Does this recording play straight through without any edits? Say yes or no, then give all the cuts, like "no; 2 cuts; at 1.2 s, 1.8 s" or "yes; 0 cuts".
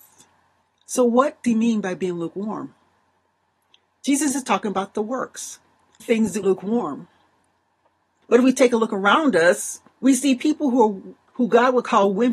no; 4 cuts; at 1.4 s, 6.0 s, 6.4 s, 9.9 s